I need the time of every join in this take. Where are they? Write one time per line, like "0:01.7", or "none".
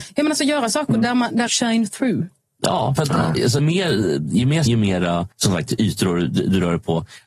0:01.5
0:03.0
0:03.6
0:04.7
0:05.3